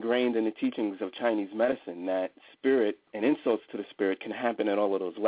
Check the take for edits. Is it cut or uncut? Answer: cut